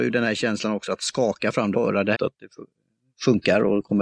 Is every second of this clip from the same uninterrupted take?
no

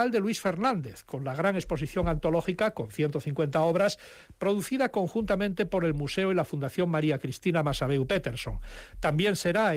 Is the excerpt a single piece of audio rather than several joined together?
yes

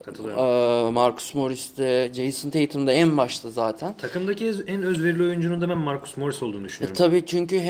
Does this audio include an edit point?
no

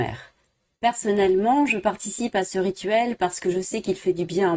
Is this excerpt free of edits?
yes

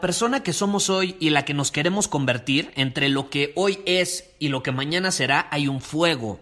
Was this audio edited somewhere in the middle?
no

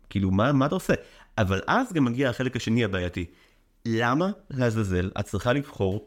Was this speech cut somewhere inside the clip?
no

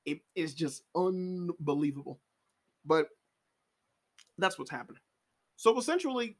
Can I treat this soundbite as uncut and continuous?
yes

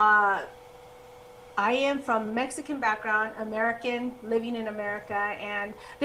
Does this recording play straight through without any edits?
yes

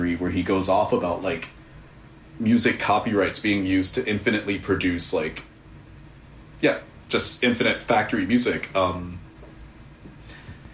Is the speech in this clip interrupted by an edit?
no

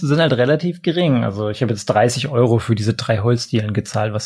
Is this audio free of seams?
yes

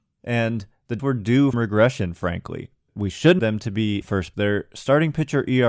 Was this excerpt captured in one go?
no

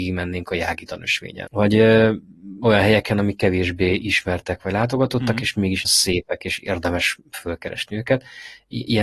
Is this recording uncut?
no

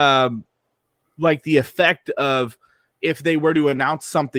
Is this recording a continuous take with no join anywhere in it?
yes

